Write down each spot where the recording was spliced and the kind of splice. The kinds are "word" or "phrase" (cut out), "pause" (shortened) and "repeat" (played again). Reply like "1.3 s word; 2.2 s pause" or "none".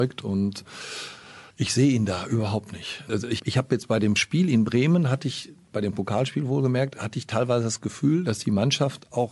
1.5 s pause; 3.4 s word